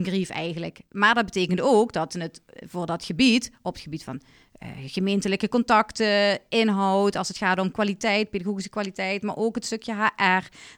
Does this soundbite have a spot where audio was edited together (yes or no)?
no